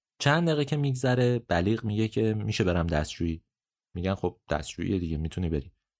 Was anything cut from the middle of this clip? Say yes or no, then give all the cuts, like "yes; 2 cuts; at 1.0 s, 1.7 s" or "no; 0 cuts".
no; 0 cuts